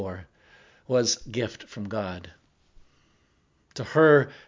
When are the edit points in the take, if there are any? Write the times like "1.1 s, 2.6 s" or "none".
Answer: 1.2 s